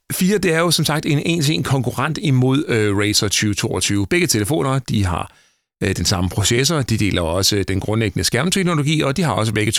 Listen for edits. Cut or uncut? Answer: uncut